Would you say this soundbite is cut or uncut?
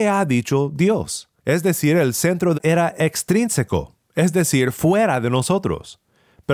cut